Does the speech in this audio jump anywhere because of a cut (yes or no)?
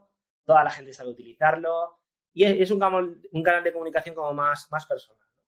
no